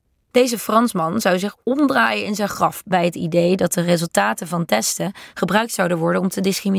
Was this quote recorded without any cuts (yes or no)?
yes